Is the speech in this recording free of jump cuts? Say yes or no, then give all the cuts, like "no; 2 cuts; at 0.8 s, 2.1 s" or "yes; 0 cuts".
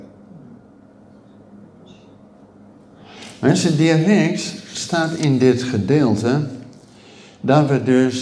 yes; 0 cuts